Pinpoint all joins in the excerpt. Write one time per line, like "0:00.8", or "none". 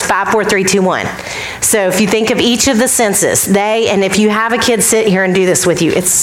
none